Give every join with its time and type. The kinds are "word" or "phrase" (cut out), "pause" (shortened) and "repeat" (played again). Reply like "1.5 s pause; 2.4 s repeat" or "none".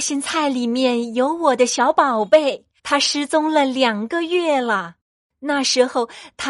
2.8 s pause